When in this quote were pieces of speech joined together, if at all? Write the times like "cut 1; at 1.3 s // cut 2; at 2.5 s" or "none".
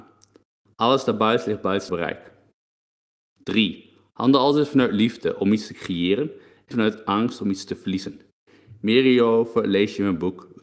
cut 1; at 1.9 s // cut 2; at 6.7 s